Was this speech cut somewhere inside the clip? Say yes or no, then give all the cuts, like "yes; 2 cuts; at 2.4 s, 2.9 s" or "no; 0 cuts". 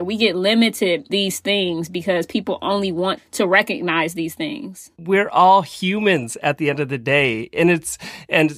yes; 2 cuts; at 1.1 s, 3.2 s